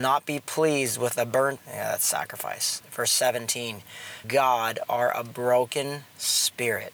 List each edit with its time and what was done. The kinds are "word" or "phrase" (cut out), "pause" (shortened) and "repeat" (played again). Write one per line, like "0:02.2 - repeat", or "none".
0:01.6 - word
0:04.2 - phrase